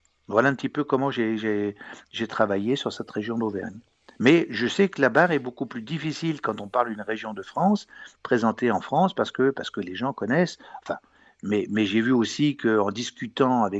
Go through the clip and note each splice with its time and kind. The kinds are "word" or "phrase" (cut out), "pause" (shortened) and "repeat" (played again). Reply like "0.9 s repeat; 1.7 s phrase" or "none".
none